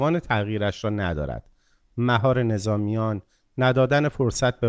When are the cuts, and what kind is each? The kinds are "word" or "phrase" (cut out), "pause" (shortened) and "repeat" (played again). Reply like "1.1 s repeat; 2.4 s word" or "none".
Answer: none